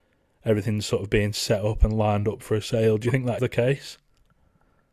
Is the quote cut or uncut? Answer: cut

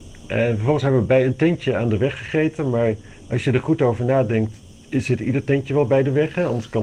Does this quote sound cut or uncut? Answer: uncut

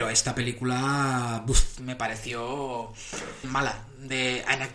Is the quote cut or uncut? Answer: cut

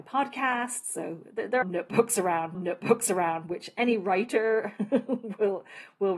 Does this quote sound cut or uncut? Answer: cut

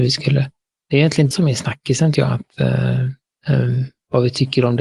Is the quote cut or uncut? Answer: cut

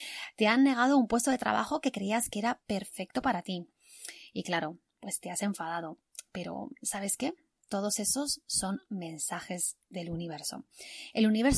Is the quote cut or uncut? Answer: uncut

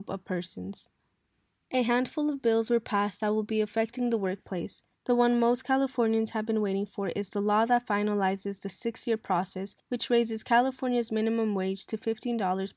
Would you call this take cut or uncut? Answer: uncut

